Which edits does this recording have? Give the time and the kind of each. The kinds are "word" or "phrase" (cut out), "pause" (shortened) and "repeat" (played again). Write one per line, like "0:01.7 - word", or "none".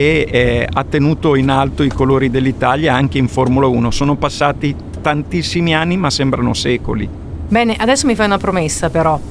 none